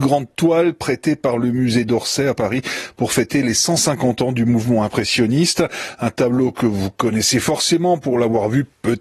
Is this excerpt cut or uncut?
uncut